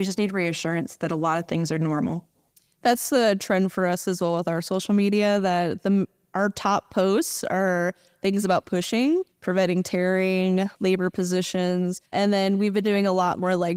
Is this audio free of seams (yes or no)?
no